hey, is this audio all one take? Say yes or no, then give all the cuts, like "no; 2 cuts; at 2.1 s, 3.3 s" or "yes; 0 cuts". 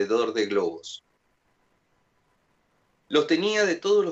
yes; 0 cuts